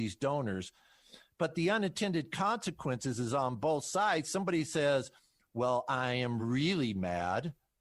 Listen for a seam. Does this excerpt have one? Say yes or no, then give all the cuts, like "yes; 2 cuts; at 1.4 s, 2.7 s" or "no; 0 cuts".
no; 0 cuts